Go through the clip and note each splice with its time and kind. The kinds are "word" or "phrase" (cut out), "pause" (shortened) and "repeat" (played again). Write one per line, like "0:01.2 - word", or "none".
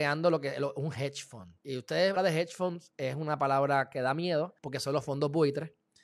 0:01.6 - pause
0:02.2 - phrase
0:04.6 - pause